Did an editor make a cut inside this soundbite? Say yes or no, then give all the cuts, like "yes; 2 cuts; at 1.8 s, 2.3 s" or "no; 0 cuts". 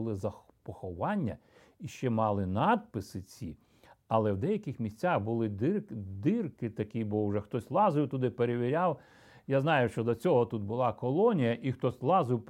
no; 0 cuts